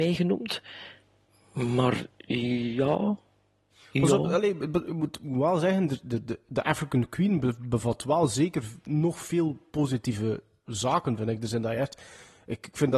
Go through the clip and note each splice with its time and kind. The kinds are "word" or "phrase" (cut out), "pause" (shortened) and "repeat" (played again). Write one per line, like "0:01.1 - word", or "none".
none

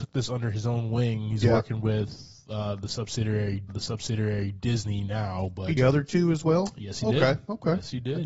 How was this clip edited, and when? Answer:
0:03.7 - repeat
0:05.8 - phrase

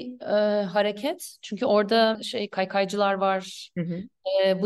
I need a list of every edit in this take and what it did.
0:02.1 - word

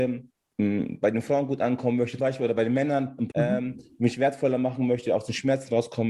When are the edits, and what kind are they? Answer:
0:02.2 - word
0:03.3 - word

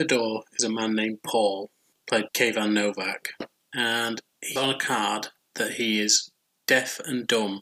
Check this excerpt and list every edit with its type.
0:02.3 - word
0:04.6 - word

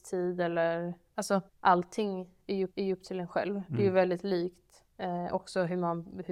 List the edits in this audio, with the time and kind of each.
0:01.5 - pause
0:02.7 - repeat
0:04.9 - pause

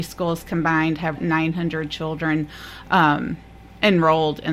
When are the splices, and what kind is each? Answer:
0:01.2 - phrase

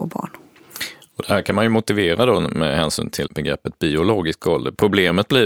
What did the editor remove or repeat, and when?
0:03.3 - word

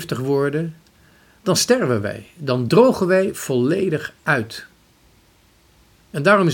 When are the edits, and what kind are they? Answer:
none

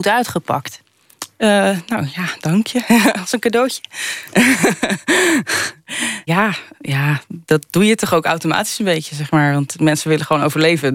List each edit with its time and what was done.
0:06.3 - word
0:06.7 - word

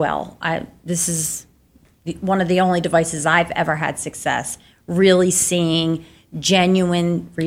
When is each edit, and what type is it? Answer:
none

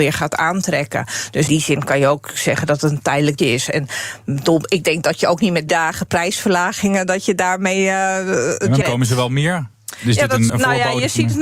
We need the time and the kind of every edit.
0:01.5 - word
0:03.4 - word
0:05.7 - word
0:08.8 - word
0:10.5 - word

